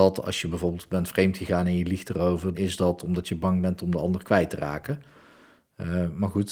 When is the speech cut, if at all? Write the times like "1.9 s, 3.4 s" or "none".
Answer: 2.5 s